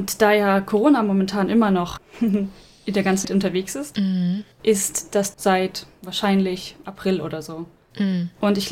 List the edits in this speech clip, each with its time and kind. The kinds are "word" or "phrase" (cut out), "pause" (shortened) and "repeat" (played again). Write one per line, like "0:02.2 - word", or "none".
0:02.0 - word
0:03.2 - word
0:04.5 - pause
0:05.3 - phrase